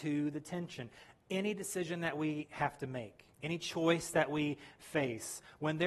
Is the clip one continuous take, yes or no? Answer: no